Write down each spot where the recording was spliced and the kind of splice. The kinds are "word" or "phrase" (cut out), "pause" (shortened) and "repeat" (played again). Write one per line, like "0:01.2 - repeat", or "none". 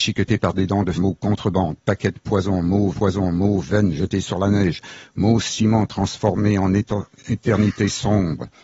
0:00.9 - word
0:02.9 - repeat